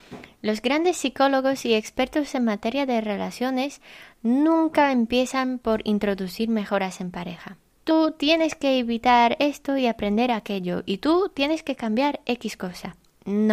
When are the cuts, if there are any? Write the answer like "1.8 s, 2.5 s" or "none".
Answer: none